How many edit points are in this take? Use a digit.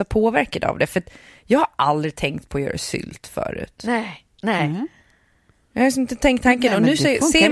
0